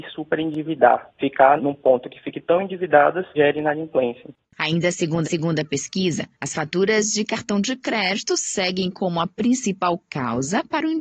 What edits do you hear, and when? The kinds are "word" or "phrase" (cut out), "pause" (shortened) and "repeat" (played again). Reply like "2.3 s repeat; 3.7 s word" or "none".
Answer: 1.6 s word; 3.4 s word; 5.2 s repeat